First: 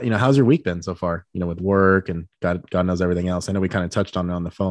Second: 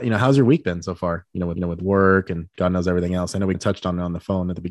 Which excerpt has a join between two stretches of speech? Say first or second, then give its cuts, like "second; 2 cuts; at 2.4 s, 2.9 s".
second; 3 cuts; at 1.6 s, 2.5 s, 3.5 s